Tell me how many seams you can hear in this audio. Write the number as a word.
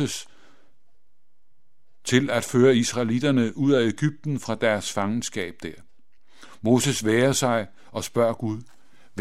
zero